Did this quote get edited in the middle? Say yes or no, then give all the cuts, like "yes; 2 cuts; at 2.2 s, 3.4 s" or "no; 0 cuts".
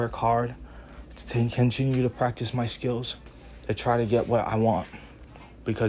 no; 0 cuts